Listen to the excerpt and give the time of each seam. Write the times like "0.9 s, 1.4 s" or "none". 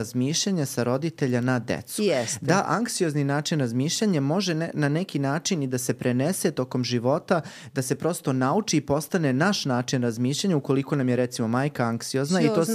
none